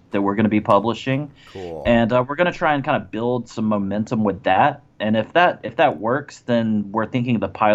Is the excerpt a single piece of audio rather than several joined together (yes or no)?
yes